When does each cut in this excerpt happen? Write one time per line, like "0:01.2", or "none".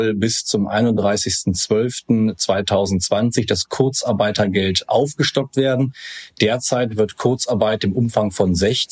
none